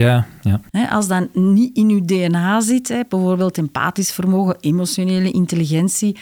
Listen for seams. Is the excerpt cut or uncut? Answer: uncut